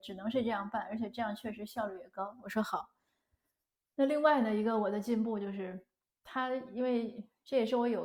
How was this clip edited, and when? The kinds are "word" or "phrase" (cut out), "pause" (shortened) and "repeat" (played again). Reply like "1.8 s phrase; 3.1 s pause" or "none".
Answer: none